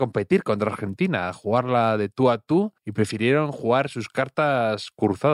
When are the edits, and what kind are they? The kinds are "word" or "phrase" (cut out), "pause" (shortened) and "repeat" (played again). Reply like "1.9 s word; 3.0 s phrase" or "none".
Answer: 2.8 s pause